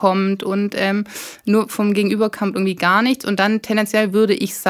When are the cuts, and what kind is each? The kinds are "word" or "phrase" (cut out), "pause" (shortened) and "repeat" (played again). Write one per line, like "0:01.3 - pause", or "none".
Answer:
none